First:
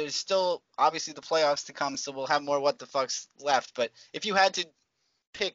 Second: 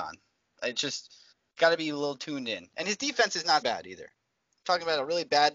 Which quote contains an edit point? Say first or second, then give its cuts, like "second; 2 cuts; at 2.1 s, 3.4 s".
second; 2 cuts; at 1.3 s, 3.6 s